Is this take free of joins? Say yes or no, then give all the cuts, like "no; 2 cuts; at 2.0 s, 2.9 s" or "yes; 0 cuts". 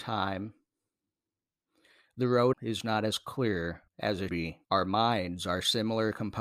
no; 4 cuts; at 2.5 s, 3.9 s, 4.3 s, 4.6 s